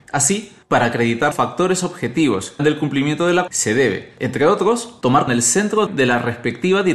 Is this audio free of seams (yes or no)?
no